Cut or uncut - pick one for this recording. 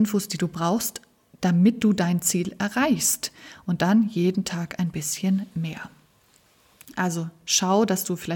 uncut